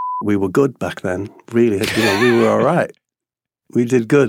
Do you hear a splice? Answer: no; 0 cuts

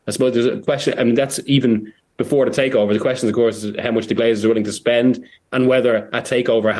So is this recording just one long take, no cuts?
yes; 0 cuts

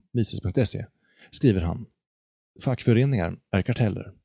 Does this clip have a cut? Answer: no; 0 cuts

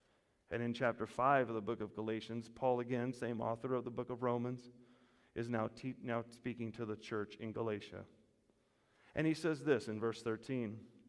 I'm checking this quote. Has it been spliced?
no; 0 cuts

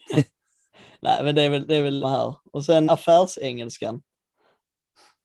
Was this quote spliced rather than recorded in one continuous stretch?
yes; 2 cuts; at 2.0 s, 2.9 s

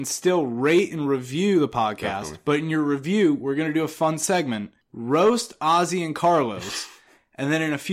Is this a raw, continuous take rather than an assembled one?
no; 1 cut; at 4.8 s

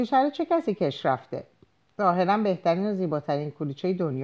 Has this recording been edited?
no; 0 cuts

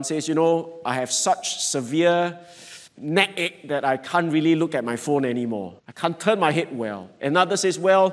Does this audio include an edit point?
yes; 2 cuts; at 2.9 s, 5.8 s

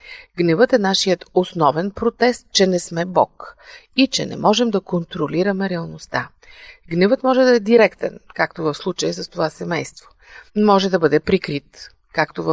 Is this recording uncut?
no; 1 cut; at 10.5 s

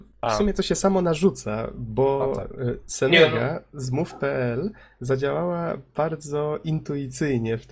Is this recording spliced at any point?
no; 0 cuts

